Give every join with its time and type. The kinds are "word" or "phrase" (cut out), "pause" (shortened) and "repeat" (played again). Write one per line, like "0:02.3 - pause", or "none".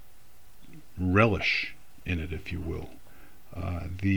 none